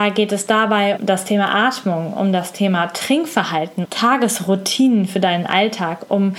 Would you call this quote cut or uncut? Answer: cut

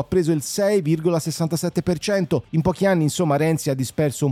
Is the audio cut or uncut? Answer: uncut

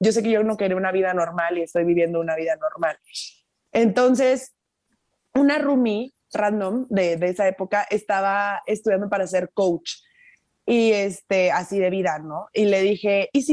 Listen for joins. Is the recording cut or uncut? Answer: uncut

